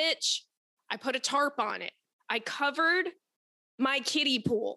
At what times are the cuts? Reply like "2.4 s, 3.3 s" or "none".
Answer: none